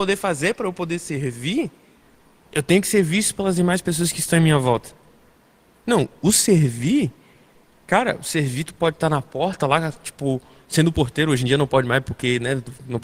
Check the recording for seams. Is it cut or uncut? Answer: uncut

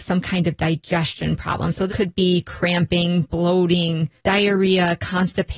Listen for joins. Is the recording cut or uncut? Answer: cut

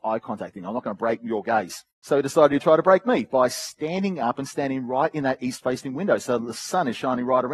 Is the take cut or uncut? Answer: cut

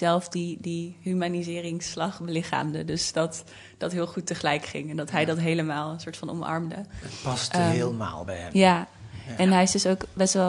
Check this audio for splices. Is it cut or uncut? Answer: uncut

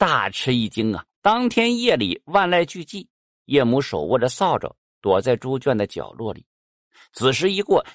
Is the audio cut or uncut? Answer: cut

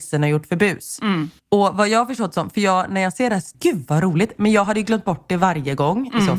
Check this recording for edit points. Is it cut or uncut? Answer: cut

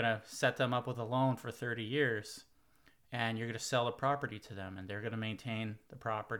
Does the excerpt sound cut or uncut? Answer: uncut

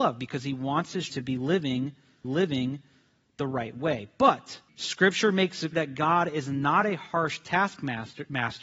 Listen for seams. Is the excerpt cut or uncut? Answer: cut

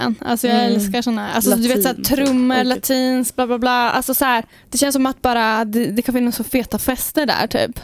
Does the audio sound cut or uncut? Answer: cut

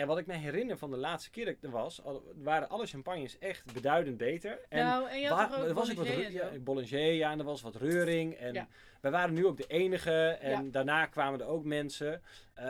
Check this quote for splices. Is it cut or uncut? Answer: uncut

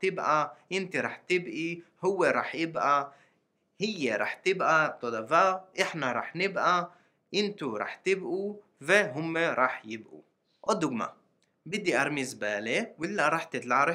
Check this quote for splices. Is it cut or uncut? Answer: uncut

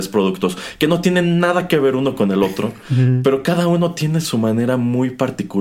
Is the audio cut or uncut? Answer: uncut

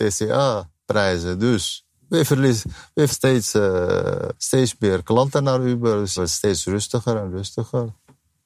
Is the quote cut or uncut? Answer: cut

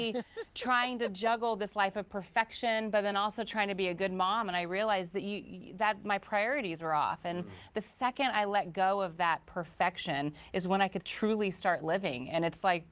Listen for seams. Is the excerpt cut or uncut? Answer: uncut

